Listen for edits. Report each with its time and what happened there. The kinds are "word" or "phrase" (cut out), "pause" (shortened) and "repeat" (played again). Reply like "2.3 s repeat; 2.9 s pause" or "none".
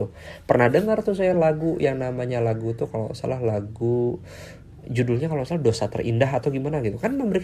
none